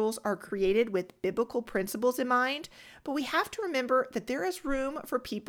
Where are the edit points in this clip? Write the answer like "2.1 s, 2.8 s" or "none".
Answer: none